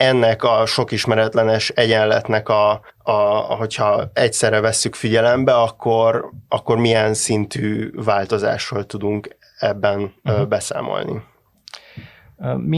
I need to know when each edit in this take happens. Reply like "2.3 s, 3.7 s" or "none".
2.9 s, 10.2 s